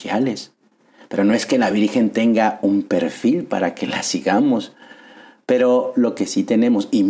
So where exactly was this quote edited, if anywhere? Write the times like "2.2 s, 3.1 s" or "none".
none